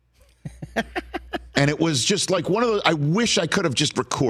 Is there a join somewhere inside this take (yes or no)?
no